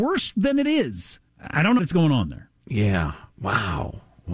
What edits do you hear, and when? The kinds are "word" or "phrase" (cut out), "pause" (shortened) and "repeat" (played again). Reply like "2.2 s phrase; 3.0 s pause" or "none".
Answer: 1.3 s pause; 1.8 s word; 2.6 s pause